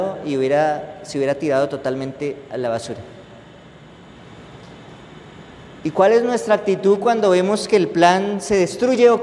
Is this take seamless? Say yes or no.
yes